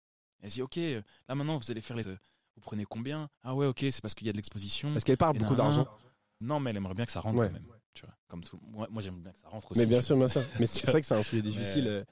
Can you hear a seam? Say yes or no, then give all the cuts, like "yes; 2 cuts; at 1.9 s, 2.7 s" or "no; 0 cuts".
yes; 5 cuts; at 2.0 s, 3.3 s, 6.4 s, 7.8 s, 8.2 s